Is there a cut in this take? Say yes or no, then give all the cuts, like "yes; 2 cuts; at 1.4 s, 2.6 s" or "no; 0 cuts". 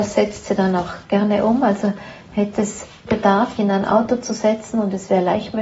yes; 2 cuts; at 3.1 s, 3.6 s